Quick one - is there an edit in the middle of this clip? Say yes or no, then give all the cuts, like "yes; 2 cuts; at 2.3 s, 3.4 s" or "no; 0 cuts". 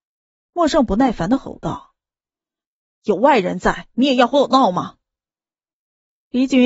no; 0 cuts